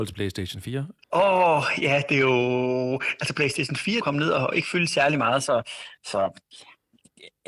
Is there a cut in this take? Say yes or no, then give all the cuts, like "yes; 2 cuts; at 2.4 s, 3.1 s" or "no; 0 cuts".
yes; 1 cut; at 4.0 s